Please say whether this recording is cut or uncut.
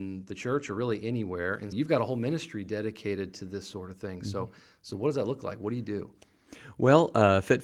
cut